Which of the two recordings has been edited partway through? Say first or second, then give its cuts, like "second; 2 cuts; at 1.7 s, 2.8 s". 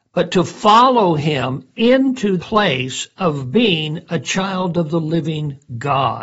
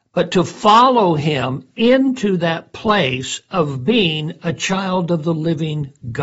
first; 1 cut; at 2.4 s